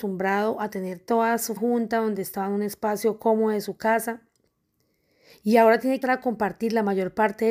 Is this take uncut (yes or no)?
no